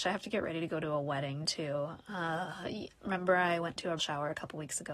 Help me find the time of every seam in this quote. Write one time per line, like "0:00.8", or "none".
0:04.0